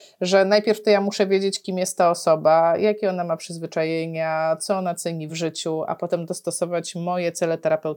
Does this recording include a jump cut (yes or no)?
no